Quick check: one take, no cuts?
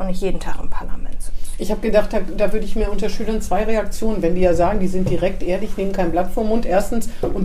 yes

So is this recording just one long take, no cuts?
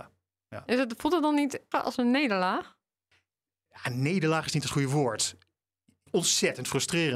no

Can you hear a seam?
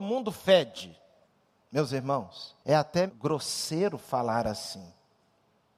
yes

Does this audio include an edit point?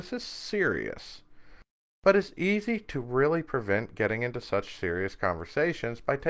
no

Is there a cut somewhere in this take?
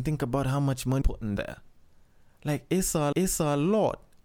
yes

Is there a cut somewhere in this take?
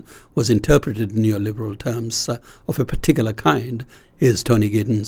no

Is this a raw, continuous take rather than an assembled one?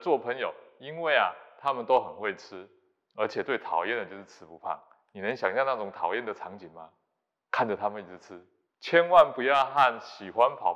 yes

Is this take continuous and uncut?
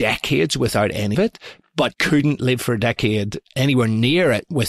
no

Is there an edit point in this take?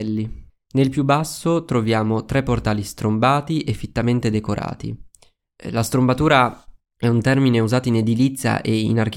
no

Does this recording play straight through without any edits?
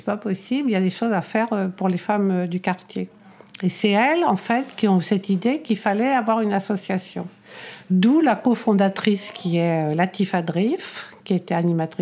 yes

